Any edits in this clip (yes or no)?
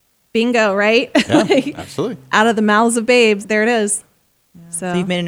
yes